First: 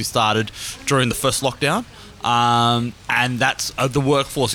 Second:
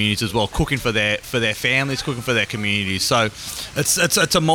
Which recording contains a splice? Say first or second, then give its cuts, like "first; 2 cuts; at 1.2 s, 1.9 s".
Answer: first; 1 cut; at 3.0 s